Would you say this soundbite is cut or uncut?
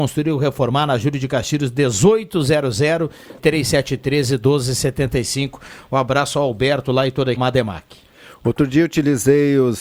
cut